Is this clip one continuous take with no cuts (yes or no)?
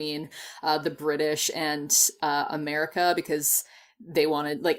yes